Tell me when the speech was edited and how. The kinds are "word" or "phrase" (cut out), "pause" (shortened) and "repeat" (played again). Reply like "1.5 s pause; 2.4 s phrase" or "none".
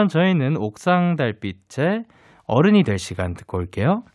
none

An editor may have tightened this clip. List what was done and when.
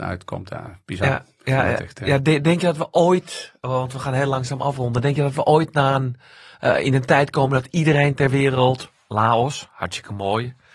none

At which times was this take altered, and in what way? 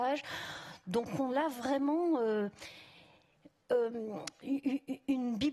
1.3 s word

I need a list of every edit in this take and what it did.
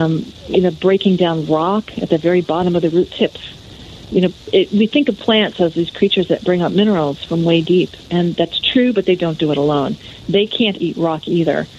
10.7 s word

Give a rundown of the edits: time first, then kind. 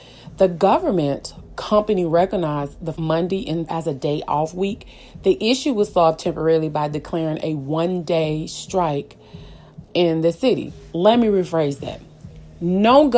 1.5 s word; 2.9 s word; 3.7 s word; 9.8 s word

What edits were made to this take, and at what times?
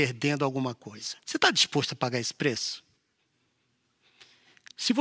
1.2 s pause

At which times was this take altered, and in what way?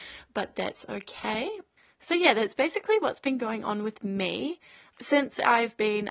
none

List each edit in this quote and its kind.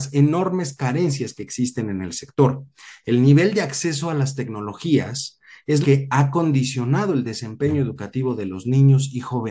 5.8 s word

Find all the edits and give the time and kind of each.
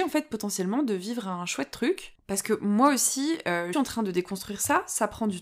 3.7 s phrase

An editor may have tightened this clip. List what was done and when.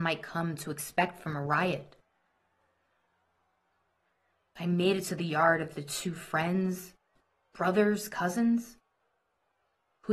none

